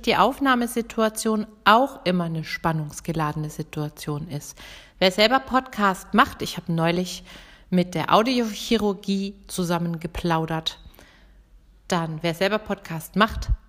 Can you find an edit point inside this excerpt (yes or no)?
no